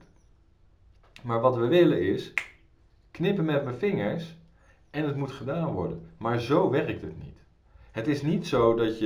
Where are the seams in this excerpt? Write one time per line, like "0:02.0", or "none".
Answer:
0:02.8